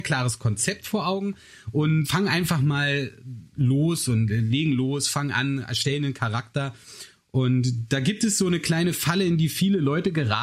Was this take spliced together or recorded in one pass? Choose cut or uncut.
cut